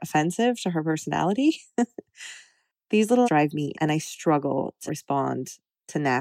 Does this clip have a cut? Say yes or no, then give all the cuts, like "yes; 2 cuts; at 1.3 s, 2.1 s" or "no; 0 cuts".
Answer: yes; 3 cuts; at 3.2 s, 3.7 s, 4.9 s